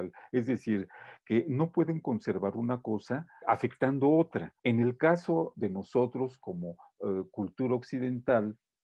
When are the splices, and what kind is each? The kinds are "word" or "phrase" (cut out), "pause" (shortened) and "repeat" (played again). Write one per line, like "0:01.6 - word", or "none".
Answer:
0:03.4 - word
0:04.6 - pause